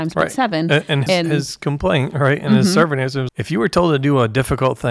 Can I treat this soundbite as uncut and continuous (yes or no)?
no